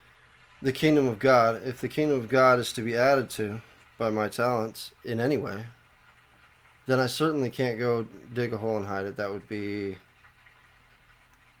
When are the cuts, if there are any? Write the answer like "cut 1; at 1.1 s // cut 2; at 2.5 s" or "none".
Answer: cut 1; at 3.8 s